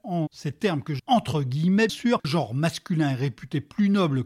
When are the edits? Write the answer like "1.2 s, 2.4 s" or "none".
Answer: 1.0 s, 1.9 s, 2.2 s

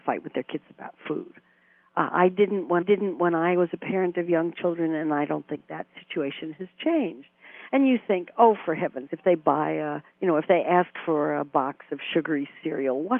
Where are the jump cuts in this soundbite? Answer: 2.8 s, 9.1 s, 10.1 s

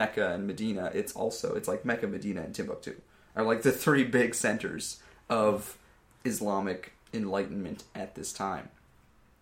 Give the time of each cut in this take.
none

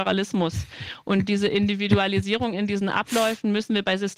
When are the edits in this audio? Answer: none

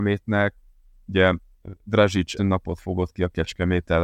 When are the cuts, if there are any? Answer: 2.4 s

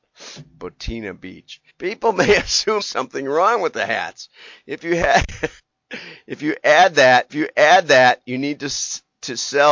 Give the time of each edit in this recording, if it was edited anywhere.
1.7 s, 2.8 s, 5.6 s, 7.3 s

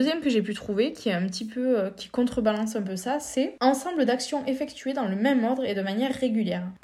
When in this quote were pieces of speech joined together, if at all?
none

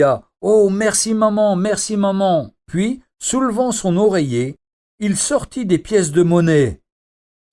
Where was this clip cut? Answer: 2.6 s

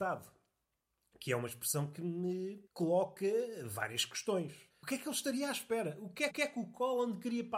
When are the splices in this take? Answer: 2.7 s, 4.7 s, 6.3 s

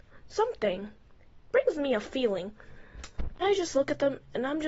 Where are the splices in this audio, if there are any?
3.4 s

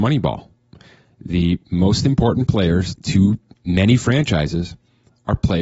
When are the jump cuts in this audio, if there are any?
1.6 s

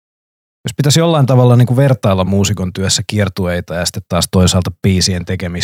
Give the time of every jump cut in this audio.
none

